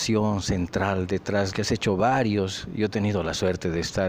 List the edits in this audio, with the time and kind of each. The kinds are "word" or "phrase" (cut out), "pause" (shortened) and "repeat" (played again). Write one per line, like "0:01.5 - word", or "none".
0:01.5 - phrase

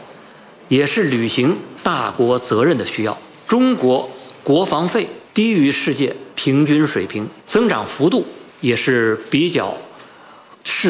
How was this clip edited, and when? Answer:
0:05.3 - pause
0:06.3 - pause
0:07.4 - pause
0:08.5 - pause

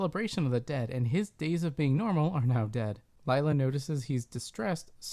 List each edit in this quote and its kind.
none

